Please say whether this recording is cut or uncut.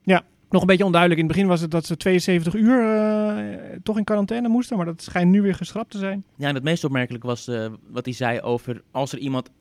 uncut